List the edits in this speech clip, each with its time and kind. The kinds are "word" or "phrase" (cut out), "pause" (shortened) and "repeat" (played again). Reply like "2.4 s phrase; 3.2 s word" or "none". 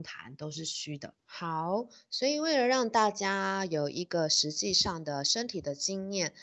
1.2 s pause